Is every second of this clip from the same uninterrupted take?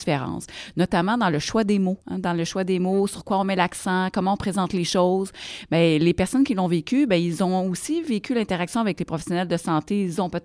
no; 1 cut; at 2.0 s

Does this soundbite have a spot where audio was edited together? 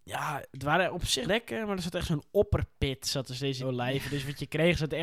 yes; 2 cuts; at 1.3 s, 3.6 s

